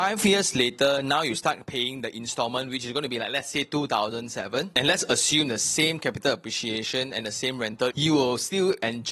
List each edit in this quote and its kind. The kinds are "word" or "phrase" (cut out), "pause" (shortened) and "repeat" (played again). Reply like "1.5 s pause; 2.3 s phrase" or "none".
7.9 s word